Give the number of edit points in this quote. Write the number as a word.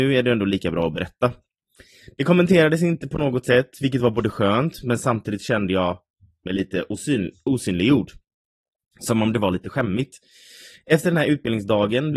zero